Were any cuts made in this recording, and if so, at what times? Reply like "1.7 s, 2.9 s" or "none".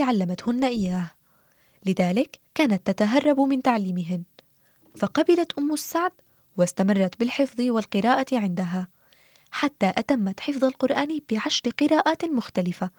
2.5 s